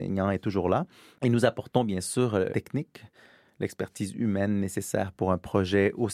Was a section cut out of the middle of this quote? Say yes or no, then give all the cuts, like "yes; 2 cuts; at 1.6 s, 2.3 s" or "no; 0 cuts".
yes; 1 cut; at 2.5 s